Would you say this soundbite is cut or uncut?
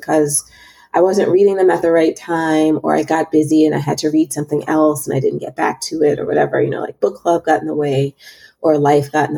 uncut